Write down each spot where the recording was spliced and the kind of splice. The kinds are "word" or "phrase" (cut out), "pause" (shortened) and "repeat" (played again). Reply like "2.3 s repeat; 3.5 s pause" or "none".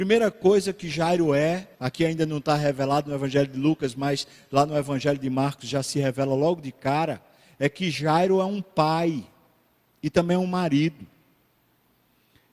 1.7 s pause

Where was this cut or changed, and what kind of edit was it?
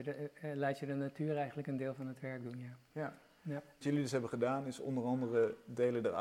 3.8 s word

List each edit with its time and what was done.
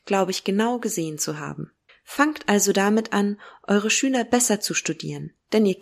1.9 s pause

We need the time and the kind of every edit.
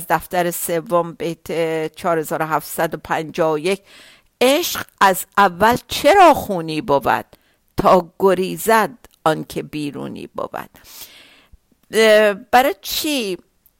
none

